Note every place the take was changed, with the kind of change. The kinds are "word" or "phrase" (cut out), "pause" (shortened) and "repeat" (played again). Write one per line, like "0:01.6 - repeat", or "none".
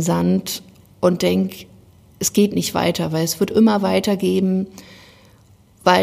none